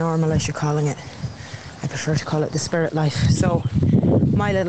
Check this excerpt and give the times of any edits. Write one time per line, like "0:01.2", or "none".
none